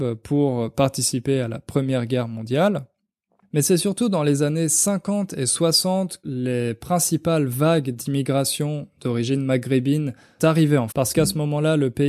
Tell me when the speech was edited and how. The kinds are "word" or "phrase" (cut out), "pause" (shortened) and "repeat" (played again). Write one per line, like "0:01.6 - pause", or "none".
0:06.2 - word
0:10.4 - word
0:10.9 - word

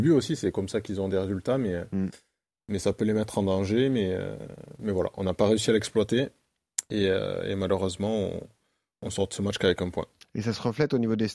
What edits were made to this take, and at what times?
none

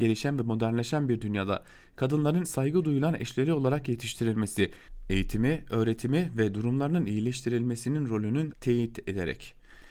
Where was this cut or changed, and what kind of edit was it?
0:02.4 - word
0:08.5 - word

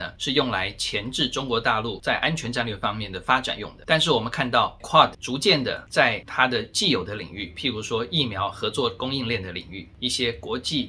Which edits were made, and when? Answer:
0:04.8 - word

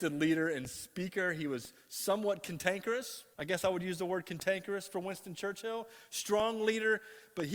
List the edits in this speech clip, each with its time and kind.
0:03.3 - pause

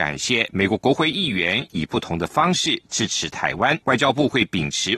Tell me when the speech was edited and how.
0:03.8 - pause

